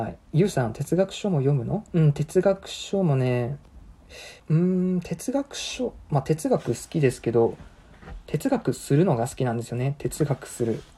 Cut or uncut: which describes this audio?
cut